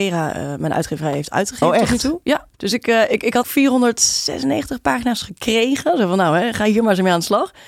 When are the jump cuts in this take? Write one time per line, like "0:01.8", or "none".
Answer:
0:02.5
0:03.4